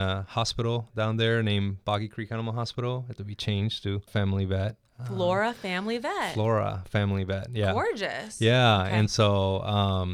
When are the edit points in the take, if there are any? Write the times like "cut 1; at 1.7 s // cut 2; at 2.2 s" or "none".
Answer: cut 1; at 3.2 s // cut 2; at 4.1 s